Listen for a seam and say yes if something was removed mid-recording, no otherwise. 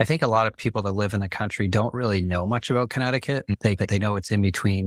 no